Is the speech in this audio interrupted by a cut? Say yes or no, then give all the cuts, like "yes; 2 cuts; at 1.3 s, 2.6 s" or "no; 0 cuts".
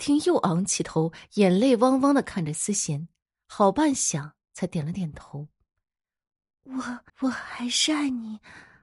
yes; 1 cut; at 7.1 s